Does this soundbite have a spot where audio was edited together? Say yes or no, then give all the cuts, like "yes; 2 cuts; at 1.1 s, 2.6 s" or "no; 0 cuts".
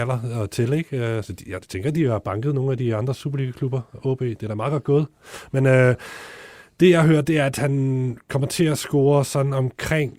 no; 0 cuts